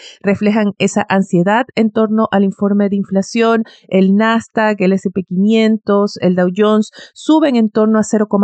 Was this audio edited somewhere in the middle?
no; 0 cuts

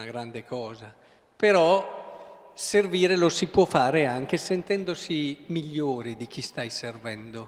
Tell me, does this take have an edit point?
no; 0 cuts

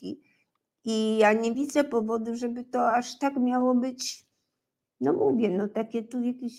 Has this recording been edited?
no; 0 cuts

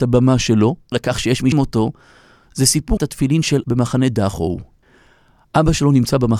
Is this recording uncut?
no; 4 cuts; at 0.9 s, 1.5 s, 3.0 s, 3.6 s

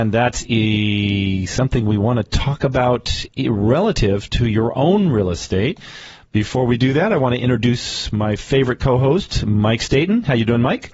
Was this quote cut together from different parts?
no; 0 cuts

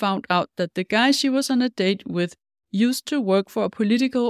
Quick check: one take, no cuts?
yes; 0 cuts

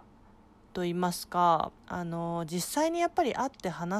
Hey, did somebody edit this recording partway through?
yes; 1 cut; at 1.8 s

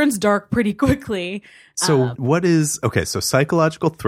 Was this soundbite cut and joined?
yes; 1 cut; at 2.1 s

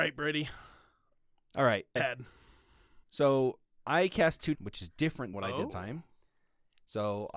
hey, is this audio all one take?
no; 5 cuts; at 2.0 s, 3.0 s, 4.5 s, 5.3 s, 5.7 s

